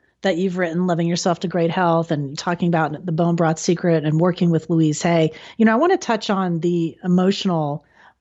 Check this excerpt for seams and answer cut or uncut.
uncut